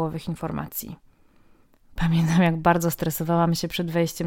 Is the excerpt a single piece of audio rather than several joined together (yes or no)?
yes